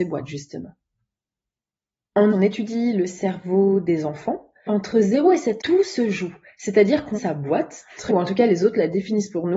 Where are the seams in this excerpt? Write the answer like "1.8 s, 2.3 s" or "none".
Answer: 2.3 s, 4.7 s, 5.6 s, 7.1 s, 8.1 s

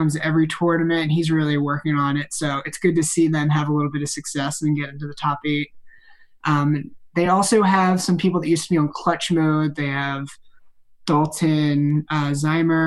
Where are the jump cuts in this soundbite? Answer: none

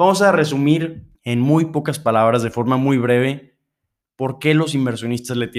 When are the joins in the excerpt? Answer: 1.1 s

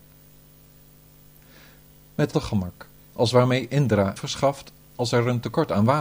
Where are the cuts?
2.3 s, 4.2 s

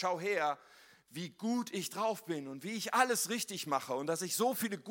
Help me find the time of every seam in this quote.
none

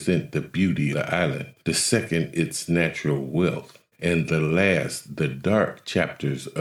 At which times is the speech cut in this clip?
0.9 s, 1.6 s, 3.9 s

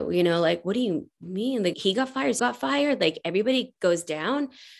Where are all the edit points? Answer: 1.7 s, 2.4 s

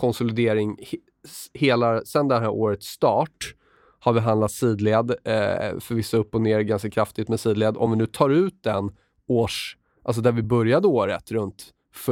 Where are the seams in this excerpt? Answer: none

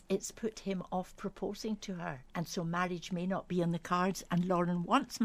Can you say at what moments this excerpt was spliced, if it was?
2.3 s

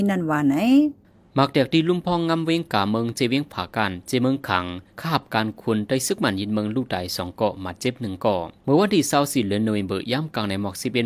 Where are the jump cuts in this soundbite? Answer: 4.9 s, 8.6 s

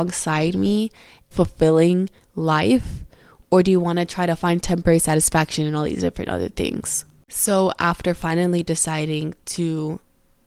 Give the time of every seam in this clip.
1.3 s

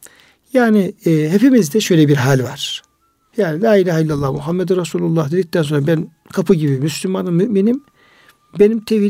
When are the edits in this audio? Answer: none

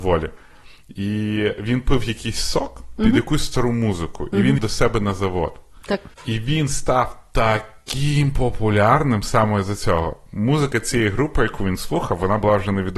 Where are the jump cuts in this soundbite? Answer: 4.6 s, 6.1 s

